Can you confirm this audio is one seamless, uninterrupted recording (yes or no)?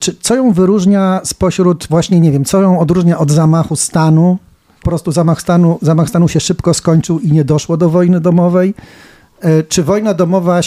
no